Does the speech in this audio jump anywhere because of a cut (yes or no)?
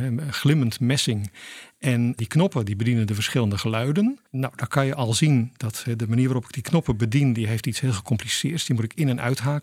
yes